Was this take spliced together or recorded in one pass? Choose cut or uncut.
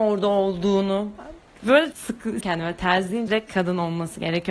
cut